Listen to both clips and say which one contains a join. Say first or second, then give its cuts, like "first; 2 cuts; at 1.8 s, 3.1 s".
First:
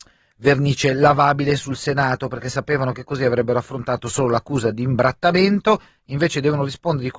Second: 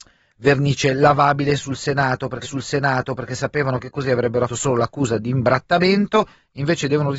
second; 2 cuts; at 2.4 s, 4.5 s